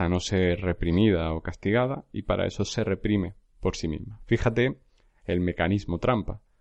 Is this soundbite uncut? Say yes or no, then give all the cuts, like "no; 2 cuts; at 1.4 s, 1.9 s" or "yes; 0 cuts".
yes; 0 cuts